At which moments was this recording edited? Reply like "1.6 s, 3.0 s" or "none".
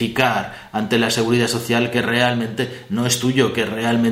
none